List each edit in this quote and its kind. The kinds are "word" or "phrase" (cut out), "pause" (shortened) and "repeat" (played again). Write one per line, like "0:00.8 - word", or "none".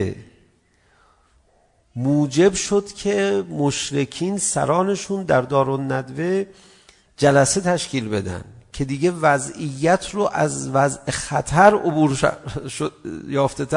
none

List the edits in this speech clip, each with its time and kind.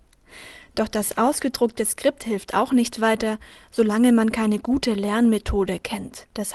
none

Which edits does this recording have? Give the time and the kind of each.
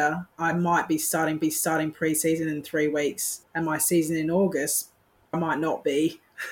0:01.4 - repeat
0:05.3 - word

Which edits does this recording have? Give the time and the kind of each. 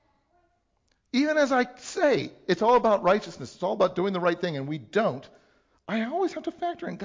none

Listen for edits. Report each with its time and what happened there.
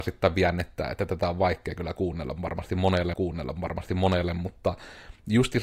0:03.1 - repeat

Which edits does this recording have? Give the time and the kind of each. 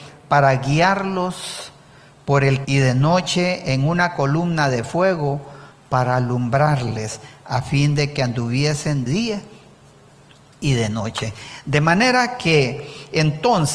0:02.6 - word
0:09.1 - word

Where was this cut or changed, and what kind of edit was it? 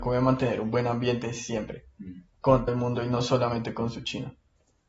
0:02.7 - word

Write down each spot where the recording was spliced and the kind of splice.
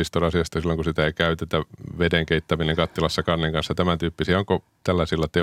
none

